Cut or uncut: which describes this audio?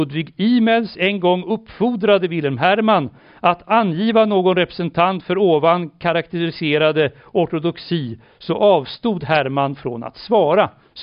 uncut